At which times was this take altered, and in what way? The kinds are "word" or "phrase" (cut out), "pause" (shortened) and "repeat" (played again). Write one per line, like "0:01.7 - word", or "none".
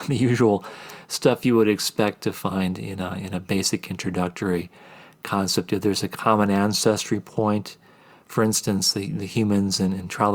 none